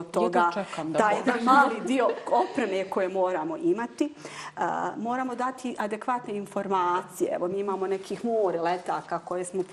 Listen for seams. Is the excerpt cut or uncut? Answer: uncut